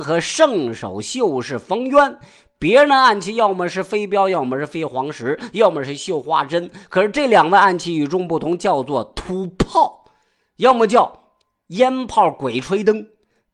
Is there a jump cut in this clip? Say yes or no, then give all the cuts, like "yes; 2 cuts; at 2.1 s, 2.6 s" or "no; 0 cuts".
no; 0 cuts